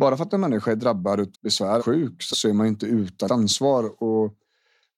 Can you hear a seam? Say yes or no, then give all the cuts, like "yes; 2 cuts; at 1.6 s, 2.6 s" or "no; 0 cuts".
yes; 4 cuts; at 1.3 s, 1.8 s, 2.3 s, 3.3 s